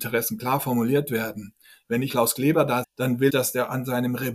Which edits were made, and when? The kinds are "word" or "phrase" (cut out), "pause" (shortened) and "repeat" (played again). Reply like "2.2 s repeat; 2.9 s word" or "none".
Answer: 2.1 s word; 2.8 s word; 3.3 s word